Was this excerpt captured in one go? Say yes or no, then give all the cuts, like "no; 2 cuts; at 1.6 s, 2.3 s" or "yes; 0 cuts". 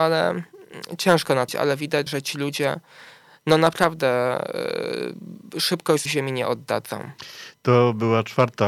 no; 3 cuts; at 1.5 s, 2.1 s, 6.1 s